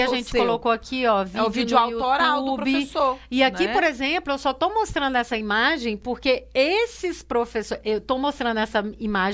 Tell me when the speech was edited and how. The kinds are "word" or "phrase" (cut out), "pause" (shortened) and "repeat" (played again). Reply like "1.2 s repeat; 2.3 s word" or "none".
none

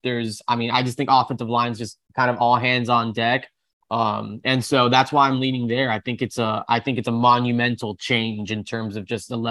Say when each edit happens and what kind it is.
none

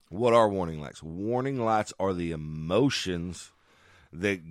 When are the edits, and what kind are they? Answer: none

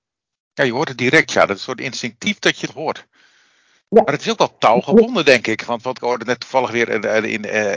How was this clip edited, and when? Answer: 2.7 s phrase; 6.0 s word

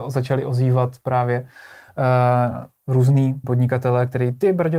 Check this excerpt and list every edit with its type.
3.4 s word

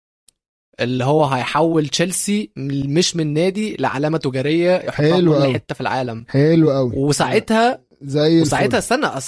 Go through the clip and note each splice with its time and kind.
none

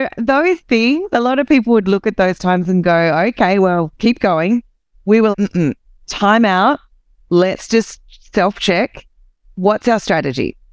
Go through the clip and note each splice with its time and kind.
5.3 s word

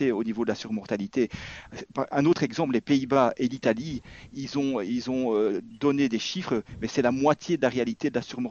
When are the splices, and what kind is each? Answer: none

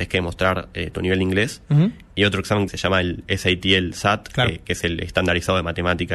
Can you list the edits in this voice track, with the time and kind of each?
2.7 s word

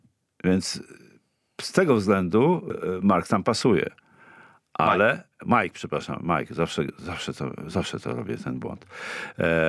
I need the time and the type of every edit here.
none

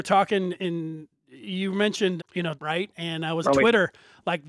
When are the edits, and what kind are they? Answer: 1.2 s pause; 2.2 s word; 2.6 s phrase; 3.4 s word

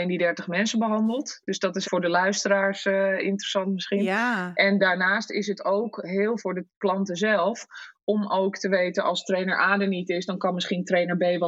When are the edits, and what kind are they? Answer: 1.8 s word; 6.4 s word

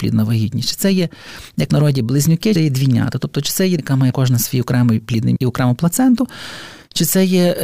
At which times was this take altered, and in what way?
1.7 s word; 2.6 s word; 3.8 s word; 4.1 s word; 5.4 s word

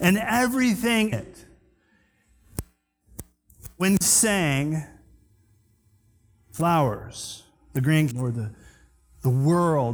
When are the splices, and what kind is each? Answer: 1.1 s word; 4.0 s word; 8.1 s word

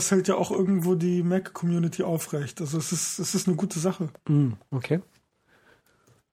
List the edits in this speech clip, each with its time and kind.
4.2 s pause

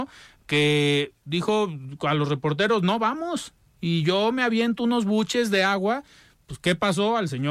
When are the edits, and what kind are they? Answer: none

